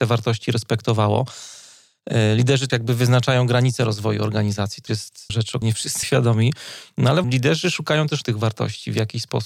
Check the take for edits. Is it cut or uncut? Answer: cut